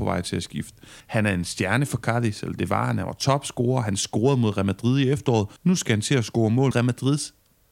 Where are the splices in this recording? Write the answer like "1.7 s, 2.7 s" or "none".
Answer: 1.0 s, 5.6 s, 6.7 s